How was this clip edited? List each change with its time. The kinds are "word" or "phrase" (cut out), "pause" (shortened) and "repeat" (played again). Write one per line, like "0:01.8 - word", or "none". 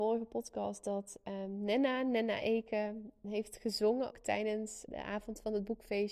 0:03.2 - word
0:04.1 - word
0:04.9 - word

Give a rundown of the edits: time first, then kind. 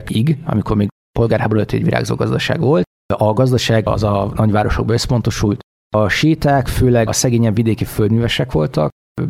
0:07.1 - word

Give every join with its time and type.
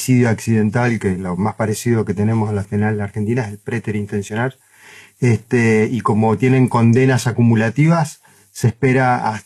0:02.6 - word

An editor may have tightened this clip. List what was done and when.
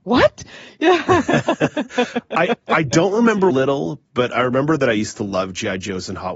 0:03.5 - phrase

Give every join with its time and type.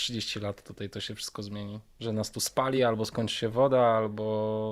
none

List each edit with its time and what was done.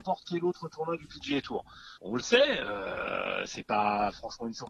0:02.0 - pause

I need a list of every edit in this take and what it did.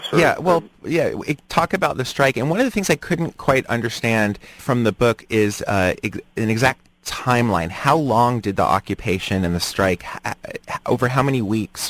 0:01.4 - pause
0:04.6 - word

